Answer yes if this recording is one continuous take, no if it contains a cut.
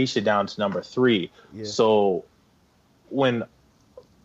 yes